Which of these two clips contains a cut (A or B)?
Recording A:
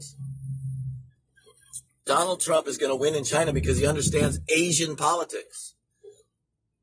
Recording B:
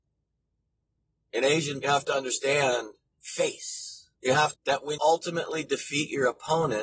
B